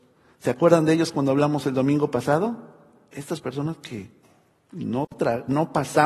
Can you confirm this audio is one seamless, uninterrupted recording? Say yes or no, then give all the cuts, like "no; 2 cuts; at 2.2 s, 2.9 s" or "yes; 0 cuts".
yes; 0 cuts